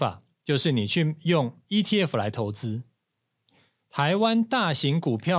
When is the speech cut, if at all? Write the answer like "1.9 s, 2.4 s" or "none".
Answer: none